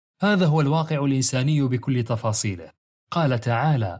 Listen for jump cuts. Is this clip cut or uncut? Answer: uncut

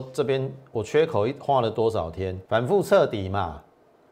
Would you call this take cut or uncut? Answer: cut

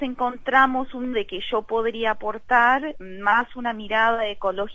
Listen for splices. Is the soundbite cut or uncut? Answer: cut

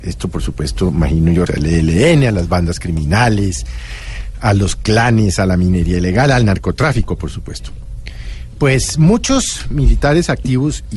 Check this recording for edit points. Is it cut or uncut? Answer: cut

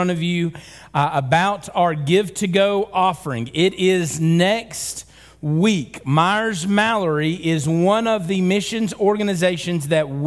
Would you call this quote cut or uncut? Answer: uncut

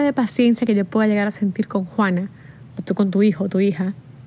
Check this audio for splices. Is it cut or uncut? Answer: uncut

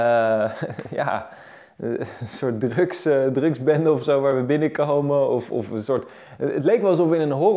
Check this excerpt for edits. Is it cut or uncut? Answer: uncut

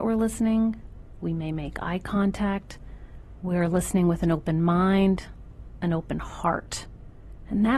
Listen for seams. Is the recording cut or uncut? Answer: uncut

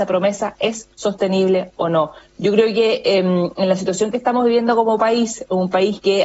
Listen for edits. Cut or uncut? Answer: cut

